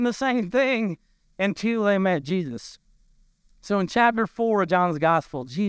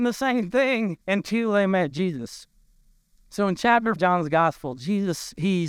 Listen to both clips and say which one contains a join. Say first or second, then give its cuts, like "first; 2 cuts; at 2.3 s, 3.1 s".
second; 2 cuts; at 1.0 s, 4.0 s